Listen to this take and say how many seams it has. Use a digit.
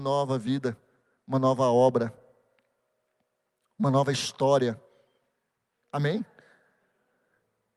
0